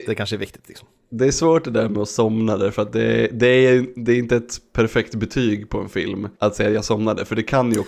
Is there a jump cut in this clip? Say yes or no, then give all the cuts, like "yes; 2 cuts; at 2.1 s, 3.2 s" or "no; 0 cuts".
yes; 1 cut; at 6.3 s